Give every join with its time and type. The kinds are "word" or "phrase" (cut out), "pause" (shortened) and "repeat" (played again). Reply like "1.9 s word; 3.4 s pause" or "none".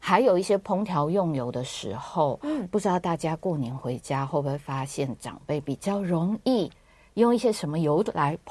none